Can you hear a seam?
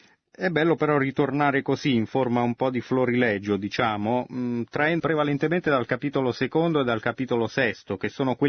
yes; 1 cut; at 5.0 s

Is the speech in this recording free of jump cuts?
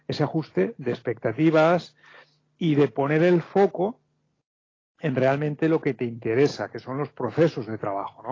yes; 0 cuts

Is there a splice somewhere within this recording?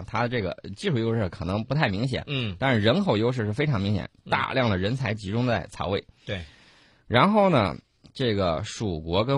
no; 0 cuts

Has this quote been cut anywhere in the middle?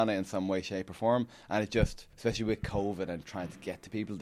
yes; 1 cut; at 2.1 s

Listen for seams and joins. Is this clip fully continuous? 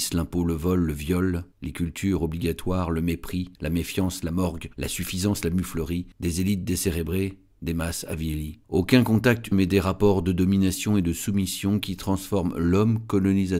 no; 6 cuts; at 1.5 s, 3.6 s, 4.7 s, 6.1 s, 8.6 s, 9.5 s

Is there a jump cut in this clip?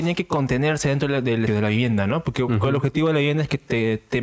yes; 1 cut; at 1.5 s

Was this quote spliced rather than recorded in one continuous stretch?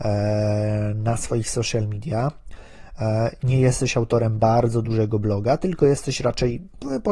no; 0 cuts

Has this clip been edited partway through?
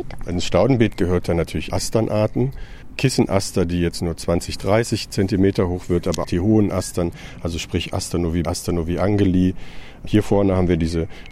yes; 3 cuts; at 1.7 s, 6.2 s, 8.4 s

